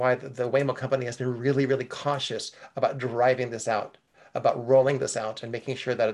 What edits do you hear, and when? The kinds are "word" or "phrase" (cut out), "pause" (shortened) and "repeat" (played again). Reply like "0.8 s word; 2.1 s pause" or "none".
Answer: none